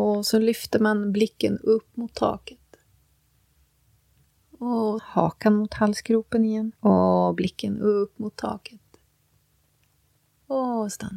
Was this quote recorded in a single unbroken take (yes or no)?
no